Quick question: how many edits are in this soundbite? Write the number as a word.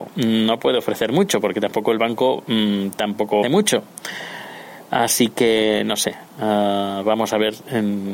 one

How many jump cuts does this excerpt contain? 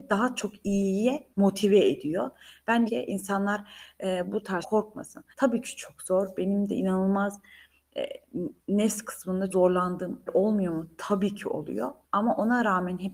nine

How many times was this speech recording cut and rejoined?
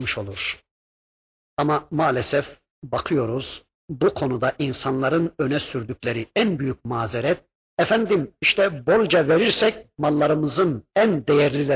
zero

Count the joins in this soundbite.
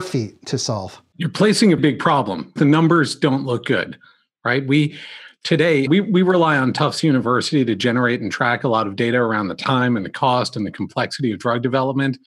three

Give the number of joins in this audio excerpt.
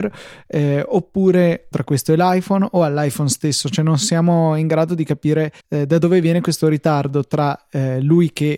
two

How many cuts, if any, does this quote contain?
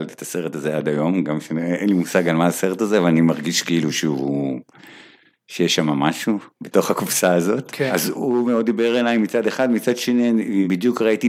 zero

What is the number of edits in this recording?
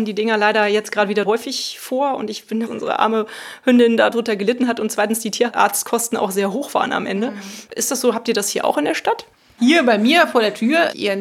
five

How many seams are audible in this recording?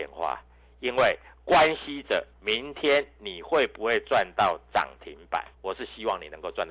one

